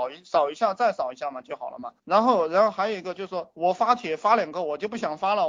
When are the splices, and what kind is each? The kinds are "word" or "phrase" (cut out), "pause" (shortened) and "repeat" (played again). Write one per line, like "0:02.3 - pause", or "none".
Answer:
0:02.0 - pause

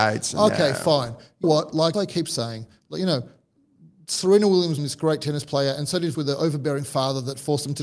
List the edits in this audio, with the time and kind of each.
0:01.4 - word
0:01.9 - word
0:04.8 - word
0:06.1 - word

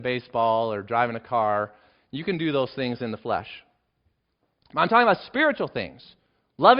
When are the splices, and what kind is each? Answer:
none

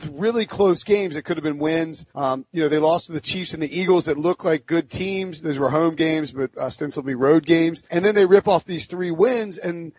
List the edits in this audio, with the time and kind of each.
0:02.1 - pause
0:07.9 - pause

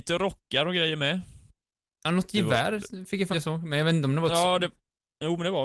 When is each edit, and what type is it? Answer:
0:03.3 - phrase

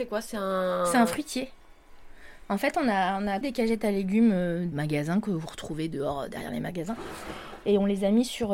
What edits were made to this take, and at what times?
0:03.4 - word
0:04.7 - word

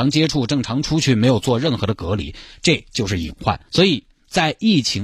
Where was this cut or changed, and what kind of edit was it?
0:03.7 - pause

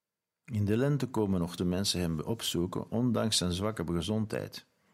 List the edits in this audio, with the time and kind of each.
0:01.6 - word

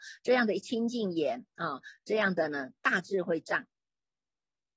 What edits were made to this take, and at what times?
0:02.8 - pause

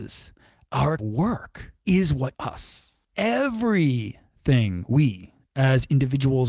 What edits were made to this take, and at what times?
0:01.0 - word
0:01.8 - pause
0:02.3 - word
0:03.0 - pause

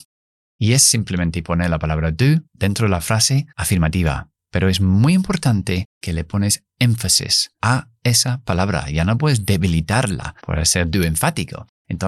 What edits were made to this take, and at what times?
0:02.4 - pause
0:03.5 - pause
0:05.9 - pause
0:07.6 - pause
0:10.4 - pause

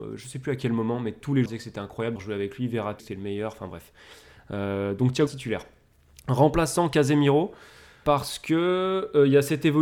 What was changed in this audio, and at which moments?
0:01.5 - word
0:02.2 - word
0:03.0 - word
0:05.3 - word

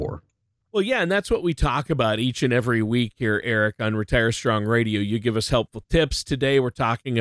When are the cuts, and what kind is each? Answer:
none

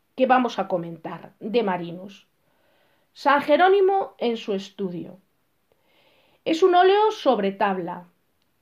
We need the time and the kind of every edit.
none

